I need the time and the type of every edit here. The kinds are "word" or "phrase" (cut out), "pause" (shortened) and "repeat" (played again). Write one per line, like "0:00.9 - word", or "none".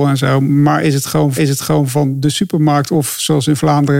0:01.4 - repeat